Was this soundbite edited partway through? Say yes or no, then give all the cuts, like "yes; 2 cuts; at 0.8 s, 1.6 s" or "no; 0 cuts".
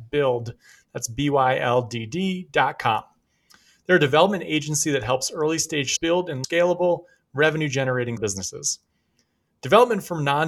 yes; 3 cuts; at 6.0 s, 6.4 s, 8.2 s